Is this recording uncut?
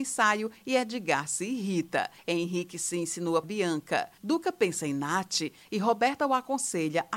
no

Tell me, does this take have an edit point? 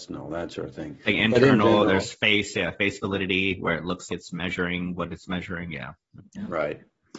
yes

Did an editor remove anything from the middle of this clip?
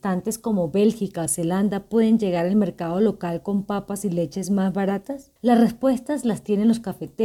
yes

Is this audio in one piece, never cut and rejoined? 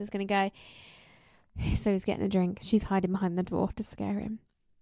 yes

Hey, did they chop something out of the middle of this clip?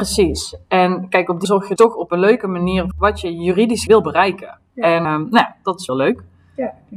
yes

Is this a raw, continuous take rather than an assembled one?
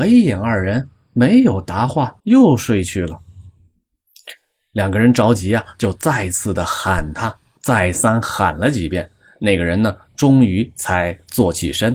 no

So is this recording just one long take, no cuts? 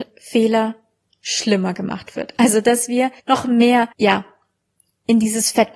no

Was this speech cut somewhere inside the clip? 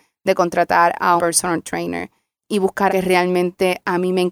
yes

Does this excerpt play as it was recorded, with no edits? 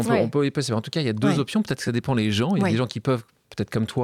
yes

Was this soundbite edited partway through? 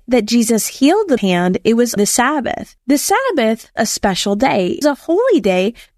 yes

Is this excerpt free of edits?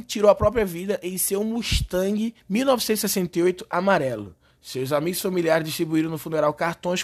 no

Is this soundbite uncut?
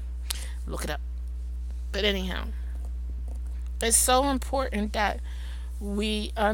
yes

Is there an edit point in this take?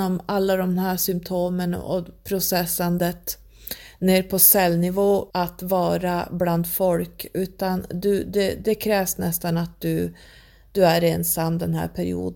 yes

